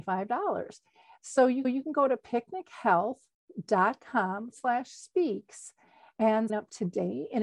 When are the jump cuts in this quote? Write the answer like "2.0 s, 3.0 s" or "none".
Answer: 1.6 s, 4.5 s, 6.5 s